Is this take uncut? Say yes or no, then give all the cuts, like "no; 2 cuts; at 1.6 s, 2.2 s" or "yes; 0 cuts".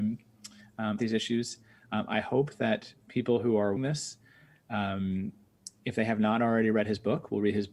no; 3 cuts; at 1.0 s, 3.0 s, 3.8 s